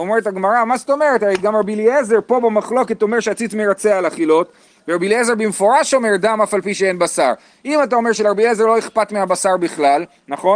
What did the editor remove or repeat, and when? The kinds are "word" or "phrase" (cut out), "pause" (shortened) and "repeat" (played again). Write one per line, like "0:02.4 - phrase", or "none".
none